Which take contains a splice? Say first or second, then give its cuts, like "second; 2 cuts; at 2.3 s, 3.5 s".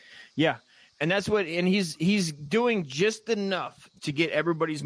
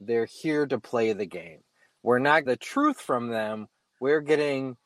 second; 1 cut; at 2.5 s